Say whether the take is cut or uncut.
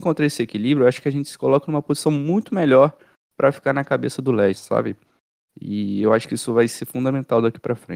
uncut